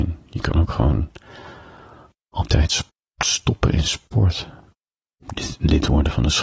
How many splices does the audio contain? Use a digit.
1